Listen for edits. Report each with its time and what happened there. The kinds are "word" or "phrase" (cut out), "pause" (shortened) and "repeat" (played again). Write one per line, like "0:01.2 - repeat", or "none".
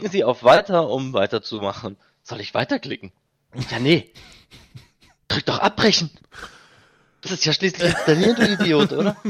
0:07.2 - word